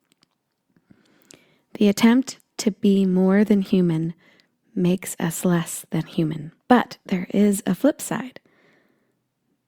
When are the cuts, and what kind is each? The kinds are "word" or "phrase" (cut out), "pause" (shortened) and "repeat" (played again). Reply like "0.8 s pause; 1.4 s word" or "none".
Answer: 6.6 s pause